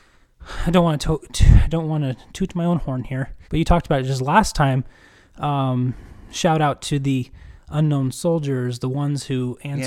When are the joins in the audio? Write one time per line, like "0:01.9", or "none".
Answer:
0:03.4